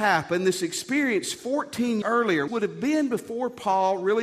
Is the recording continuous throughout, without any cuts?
no; 2 cuts; at 2.0 s, 2.5 s

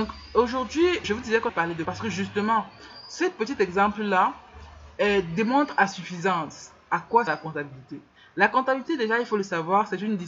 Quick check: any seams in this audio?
yes; 5 cuts; at 1.0 s, 1.5 s, 1.8 s, 7.3 s, 8.2 s

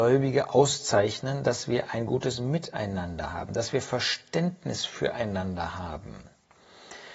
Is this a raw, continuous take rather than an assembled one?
yes; 0 cuts

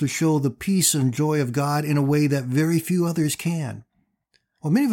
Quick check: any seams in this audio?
no; 0 cuts

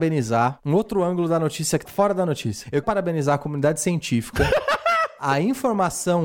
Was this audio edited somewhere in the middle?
yes; 2 cuts; at 1.8 s, 2.8 s

